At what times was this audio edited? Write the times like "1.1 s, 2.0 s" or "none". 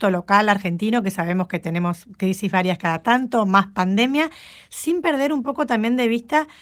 none